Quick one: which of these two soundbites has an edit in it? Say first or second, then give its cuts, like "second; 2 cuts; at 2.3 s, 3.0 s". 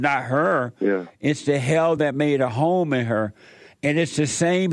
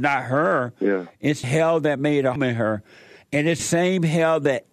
second; 3 cuts; at 1.4 s, 2.4 s, 3.6 s